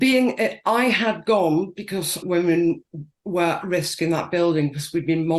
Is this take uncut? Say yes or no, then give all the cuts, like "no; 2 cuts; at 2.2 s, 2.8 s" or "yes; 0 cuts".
no; 2 cuts; at 2.2 s, 3.6 s